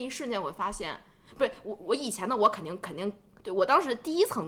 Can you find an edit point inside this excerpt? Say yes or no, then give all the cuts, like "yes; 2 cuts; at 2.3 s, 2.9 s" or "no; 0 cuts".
no; 0 cuts